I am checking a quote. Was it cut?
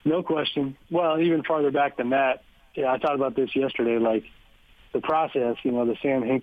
no; 0 cuts

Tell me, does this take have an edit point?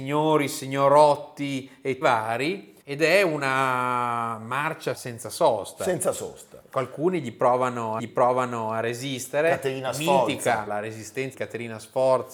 yes; 6 cuts; at 2.0 s, 2.8 s, 4.9 s, 8.0 s, 10.7 s, 11.3 s

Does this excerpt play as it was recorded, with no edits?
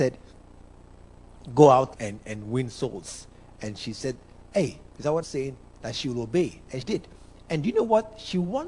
no; 3 cuts; at 1.9 s, 5.2 s, 6.8 s

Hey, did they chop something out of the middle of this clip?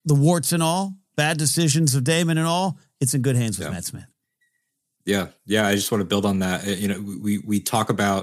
no; 0 cuts

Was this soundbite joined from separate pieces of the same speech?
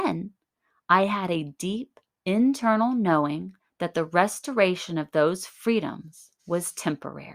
yes; 3 cuts; at 2.1 s, 3.6 s, 6.4 s

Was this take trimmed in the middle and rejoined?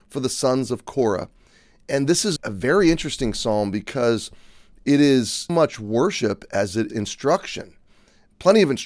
yes; 3 cuts; at 2.4 s, 5.5 s, 6.9 s

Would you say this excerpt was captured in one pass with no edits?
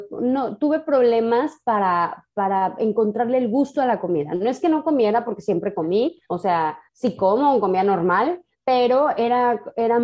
no; 3 cuts; at 6.2 s, 6.9 s, 8.5 s

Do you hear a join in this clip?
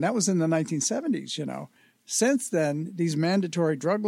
no; 0 cuts

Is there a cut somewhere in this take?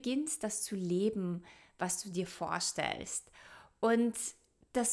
no; 0 cuts

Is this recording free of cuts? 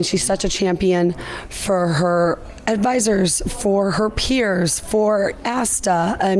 yes; 0 cuts

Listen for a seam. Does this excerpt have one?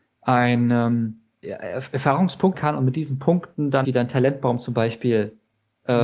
yes; 3 cuts; at 1.4 s, 2.5 s, 3.8 s

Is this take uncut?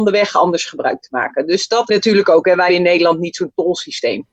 no; 2 cuts; at 1.9 s, 2.7 s

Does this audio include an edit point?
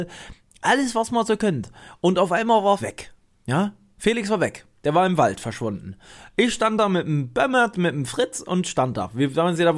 yes; 1 cut; at 2.8 s

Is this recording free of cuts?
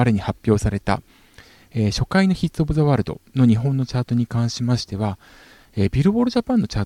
yes; 0 cuts

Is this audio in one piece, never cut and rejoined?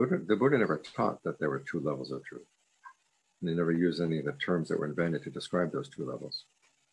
yes; 0 cuts

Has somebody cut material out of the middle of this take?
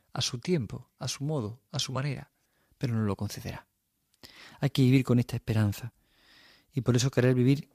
no; 0 cuts

